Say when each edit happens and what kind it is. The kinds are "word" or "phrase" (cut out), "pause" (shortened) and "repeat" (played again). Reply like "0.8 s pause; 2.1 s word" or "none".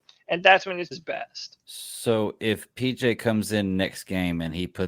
0.9 s word; 1.6 s pause